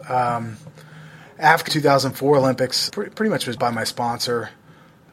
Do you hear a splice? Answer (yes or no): yes